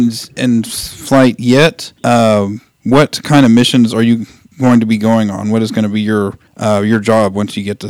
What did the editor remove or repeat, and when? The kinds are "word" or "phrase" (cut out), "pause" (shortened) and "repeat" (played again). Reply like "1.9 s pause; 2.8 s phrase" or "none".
2.0 s pause; 6.5 s pause

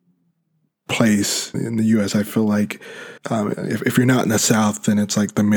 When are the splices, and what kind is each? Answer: 1.5 s word; 3.2 s pause

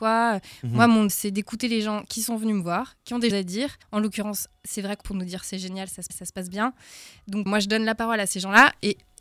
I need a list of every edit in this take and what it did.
1.1 s word; 3.3 s word; 3.8 s pause; 5.0 s phrase; 6.1 s repeat; 7.5 s word

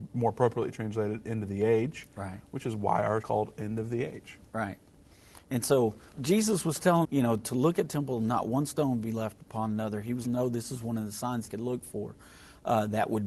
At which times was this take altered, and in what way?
3.2 s phrase; 6.1 s pause; 7.0 s word; 7.9 s word; 10.2 s phrase; 11.5 s phrase

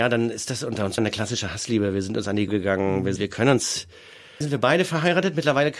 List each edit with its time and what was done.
1.0 s word; 2.5 s word; 3.2 s word; 4.4 s word

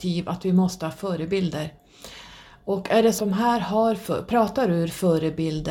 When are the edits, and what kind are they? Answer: 3.2 s word

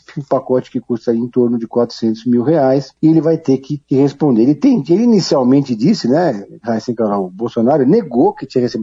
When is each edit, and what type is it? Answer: 3.0 s pause; 3.8 s pause

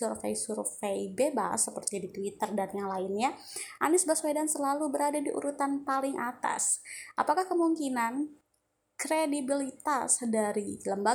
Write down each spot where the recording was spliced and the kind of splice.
none

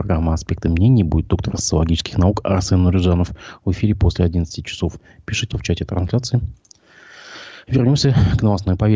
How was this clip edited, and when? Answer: 5.5 s word

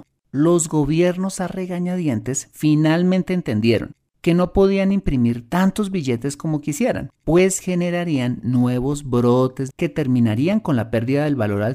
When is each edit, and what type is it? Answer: 7.2 s pause; 9.7 s phrase

